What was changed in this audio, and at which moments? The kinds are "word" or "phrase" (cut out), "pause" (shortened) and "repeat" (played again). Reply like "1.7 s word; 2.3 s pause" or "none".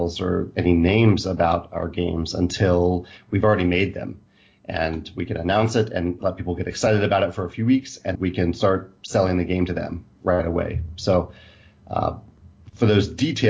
8.1 s word